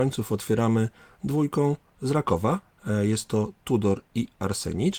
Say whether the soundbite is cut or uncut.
uncut